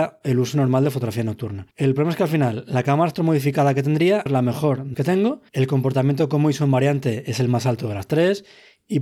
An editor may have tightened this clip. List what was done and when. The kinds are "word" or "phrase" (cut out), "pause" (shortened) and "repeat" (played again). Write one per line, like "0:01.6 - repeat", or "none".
0:01.7 - pause
0:04.3 - word
0:04.9 - word
0:05.5 - pause